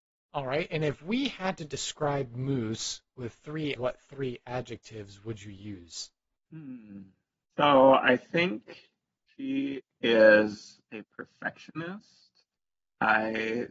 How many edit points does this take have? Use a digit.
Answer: 1